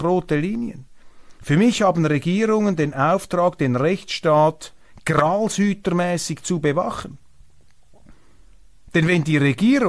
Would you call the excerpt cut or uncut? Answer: uncut